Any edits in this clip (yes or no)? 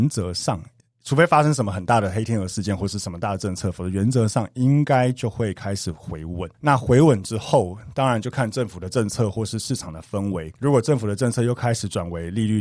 yes